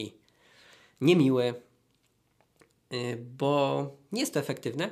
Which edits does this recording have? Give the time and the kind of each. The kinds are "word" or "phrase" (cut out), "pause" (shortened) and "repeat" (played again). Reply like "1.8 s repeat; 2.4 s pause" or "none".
none